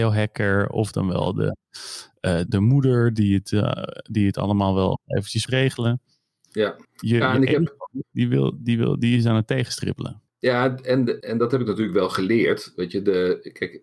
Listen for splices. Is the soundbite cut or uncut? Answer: cut